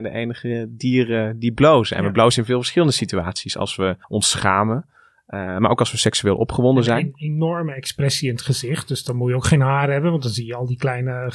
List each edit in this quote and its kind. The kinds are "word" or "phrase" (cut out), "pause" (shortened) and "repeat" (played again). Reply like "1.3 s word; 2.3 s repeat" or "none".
4.0 s pause